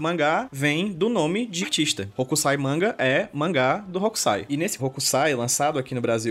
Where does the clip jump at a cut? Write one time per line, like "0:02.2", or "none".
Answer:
0:01.6
0:04.8